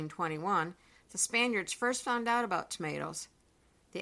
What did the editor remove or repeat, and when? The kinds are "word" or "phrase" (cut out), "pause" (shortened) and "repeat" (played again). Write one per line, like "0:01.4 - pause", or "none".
none